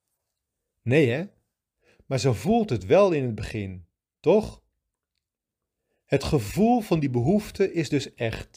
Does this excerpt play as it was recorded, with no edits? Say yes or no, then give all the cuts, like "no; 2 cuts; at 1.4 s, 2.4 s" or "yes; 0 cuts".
yes; 0 cuts